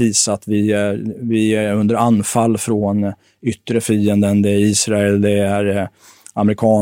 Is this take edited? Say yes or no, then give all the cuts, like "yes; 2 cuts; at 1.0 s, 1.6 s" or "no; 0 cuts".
no; 0 cuts